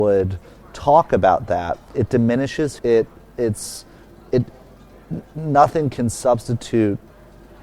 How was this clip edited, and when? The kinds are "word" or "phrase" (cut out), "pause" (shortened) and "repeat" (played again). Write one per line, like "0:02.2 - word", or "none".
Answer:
0:01.9 - word
0:02.8 - phrase
0:04.3 - word